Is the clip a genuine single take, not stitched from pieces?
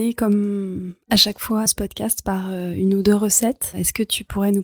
no; 1 cut; at 1.7 s

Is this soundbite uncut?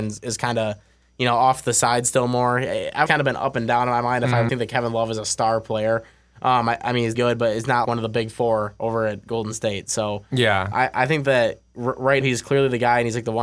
no; 6 cuts; at 3.1 s, 4.5 s, 7.1 s, 7.8 s, 10.7 s, 12.2 s

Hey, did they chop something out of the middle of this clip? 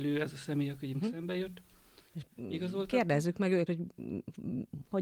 yes; 3 cuts; at 0.9 s, 2.1 s, 3.7 s

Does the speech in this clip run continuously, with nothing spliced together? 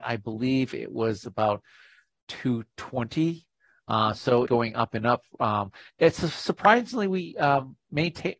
no; 1 cut; at 4.5 s

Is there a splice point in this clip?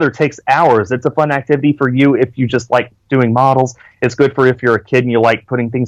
no; 0 cuts

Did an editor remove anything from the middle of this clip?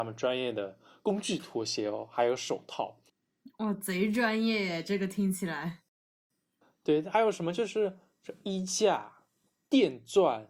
no; 0 cuts

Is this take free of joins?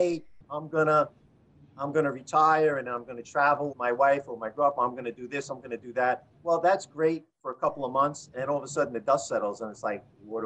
no; 1 cut; at 3.7 s

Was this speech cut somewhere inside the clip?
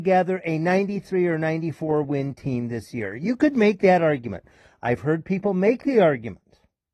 no; 0 cuts

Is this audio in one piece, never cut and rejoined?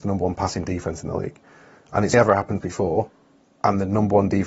no; 2 cuts; at 2.1 s, 2.6 s

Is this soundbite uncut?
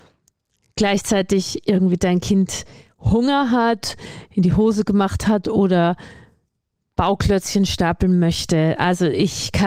yes; 0 cuts

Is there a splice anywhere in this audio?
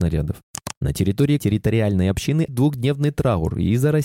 yes; 2 cuts; at 1.4 s, 2.5 s

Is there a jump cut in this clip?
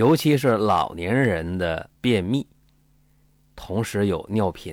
yes; 1 cut; at 2.0 s

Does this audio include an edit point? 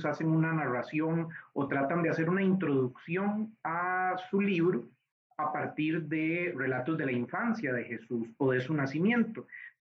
no; 0 cuts

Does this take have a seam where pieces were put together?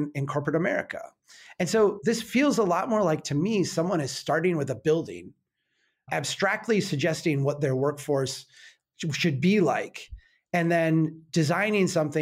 no; 0 cuts

